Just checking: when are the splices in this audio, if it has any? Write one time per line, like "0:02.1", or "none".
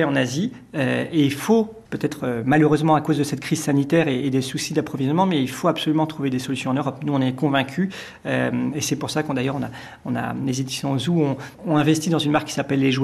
0:11.5